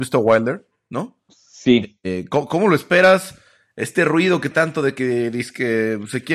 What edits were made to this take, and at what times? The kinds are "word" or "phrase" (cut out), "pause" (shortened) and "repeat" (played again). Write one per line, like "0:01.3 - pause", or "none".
0:04.5 - word